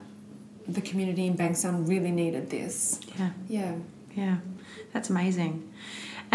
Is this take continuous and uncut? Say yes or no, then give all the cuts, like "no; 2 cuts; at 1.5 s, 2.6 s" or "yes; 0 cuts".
yes; 0 cuts